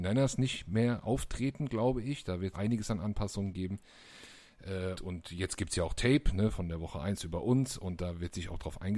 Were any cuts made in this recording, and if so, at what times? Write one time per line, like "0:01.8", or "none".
0:02.5
0:04.9
0:06.5